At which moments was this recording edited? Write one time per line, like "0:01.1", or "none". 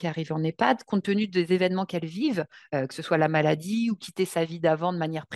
none